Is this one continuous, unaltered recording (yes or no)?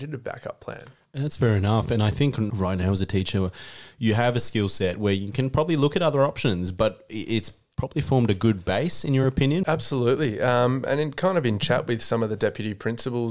yes